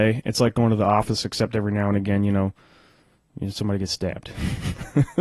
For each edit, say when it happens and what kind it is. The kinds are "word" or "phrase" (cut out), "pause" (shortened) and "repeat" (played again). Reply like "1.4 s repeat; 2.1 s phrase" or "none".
none